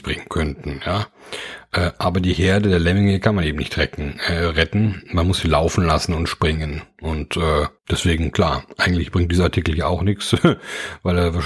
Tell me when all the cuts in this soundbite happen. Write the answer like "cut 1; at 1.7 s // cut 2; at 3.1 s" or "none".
cut 1; at 7.8 s